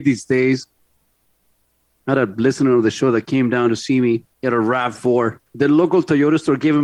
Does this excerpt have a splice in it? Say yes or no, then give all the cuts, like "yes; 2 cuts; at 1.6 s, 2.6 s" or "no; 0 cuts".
yes; 2 cuts; at 4.3 s, 5.5 s